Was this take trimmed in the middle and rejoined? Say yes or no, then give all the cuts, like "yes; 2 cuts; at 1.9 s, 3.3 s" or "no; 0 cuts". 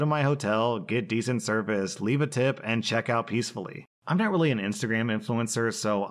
no; 0 cuts